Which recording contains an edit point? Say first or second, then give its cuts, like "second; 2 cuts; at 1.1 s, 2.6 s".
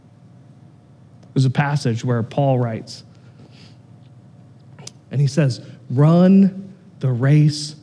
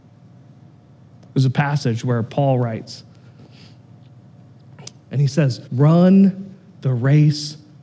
second; 1 cut; at 5.7 s